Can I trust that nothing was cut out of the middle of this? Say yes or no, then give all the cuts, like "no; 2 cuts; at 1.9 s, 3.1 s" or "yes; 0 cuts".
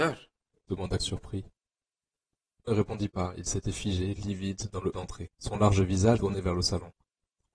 no; 5 cuts; at 1.0 s, 2.7 s, 4.9 s, 5.3 s, 6.2 s